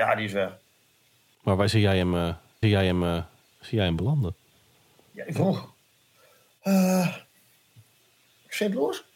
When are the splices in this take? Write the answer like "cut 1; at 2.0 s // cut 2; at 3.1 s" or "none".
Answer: cut 1; at 2.6 s